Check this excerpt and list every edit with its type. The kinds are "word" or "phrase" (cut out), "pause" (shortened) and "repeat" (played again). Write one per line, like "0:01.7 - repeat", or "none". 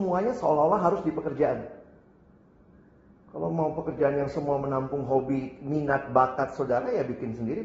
none